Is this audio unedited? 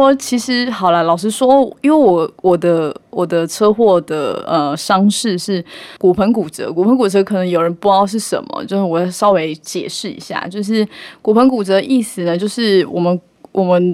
no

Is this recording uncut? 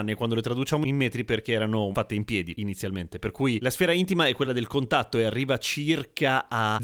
yes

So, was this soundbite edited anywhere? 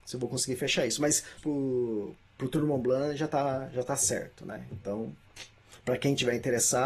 yes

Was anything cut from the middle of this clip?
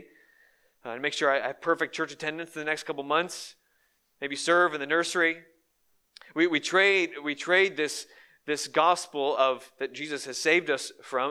yes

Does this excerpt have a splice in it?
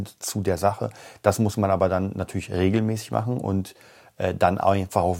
no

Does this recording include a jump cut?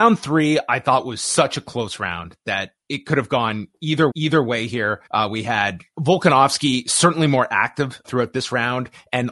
yes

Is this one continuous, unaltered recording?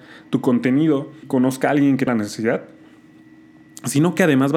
no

